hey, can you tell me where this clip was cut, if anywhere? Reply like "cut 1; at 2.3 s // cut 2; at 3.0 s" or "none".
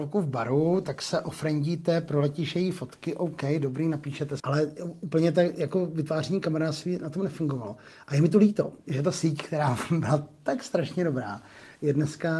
cut 1; at 4.4 s